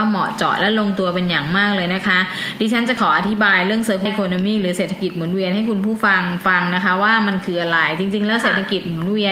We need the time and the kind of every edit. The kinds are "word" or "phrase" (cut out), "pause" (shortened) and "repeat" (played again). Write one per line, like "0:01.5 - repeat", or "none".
0:04.1 - phrase